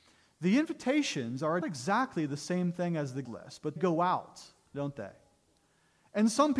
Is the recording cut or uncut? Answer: cut